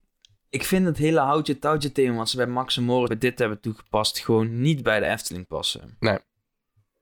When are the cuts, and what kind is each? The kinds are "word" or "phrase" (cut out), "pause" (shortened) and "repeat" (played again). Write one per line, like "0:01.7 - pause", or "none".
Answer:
0:03.1 - word